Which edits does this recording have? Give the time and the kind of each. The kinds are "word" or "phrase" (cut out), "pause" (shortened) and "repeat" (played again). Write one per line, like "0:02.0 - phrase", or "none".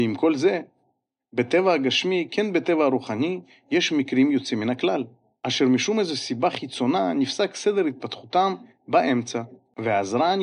none